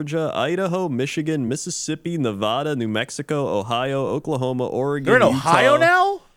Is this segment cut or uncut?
uncut